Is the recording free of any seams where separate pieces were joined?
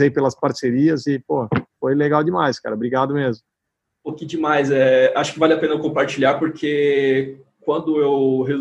yes; 0 cuts

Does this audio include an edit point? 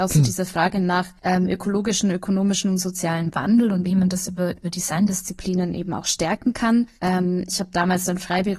yes; 2 cuts; at 1.2 s, 7.0 s

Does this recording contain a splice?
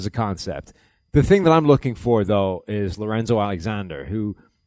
no; 0 cuts

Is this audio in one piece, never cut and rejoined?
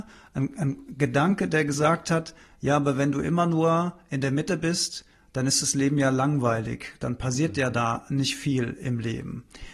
yes; 0 cuts

